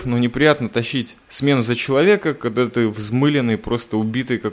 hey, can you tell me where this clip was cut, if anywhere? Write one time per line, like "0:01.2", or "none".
none

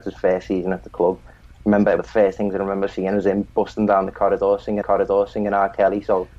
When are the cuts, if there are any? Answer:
0:02.0
0:04.8

